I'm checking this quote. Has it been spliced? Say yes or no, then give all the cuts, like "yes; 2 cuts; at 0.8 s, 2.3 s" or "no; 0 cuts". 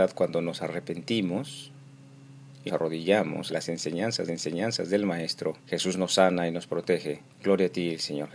yes; 5 cuts; at 2.7 s, 3.5 s, 4.3 s, 5.6 s, 7.3 s